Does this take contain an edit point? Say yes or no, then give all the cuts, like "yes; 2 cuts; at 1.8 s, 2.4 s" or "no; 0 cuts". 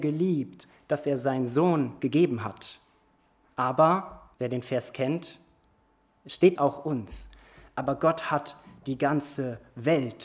yes; 3 cuts; at 2.0 s, 4.3 s, 6.6 s